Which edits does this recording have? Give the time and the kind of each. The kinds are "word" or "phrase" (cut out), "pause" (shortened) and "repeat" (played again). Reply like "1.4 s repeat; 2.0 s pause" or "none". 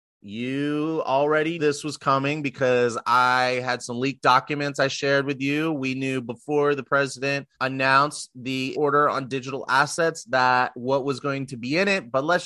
1.6 s word; 7.5 s pause; 8.7 s word